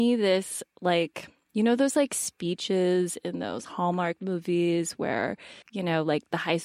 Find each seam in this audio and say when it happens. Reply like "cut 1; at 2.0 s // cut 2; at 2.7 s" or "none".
cut 1; at 5.6 s